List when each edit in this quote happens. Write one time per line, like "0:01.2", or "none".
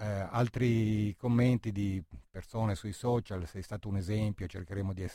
none